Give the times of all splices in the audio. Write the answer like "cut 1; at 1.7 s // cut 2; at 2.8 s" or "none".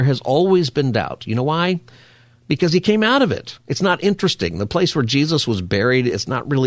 none